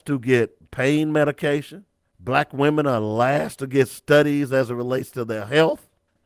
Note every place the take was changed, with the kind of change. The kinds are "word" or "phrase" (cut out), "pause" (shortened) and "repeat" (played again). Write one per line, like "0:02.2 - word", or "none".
0:02.0 - pause